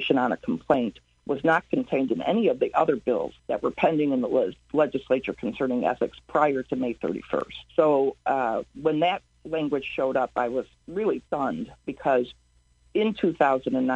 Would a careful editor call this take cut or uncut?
cut